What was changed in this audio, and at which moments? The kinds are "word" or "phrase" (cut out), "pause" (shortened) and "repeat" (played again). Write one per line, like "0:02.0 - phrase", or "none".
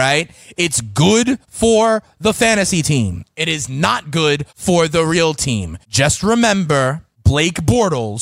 0:01.4 - pause
0:04.5 - pause
0:05.8 - pause
0:07.1 - pause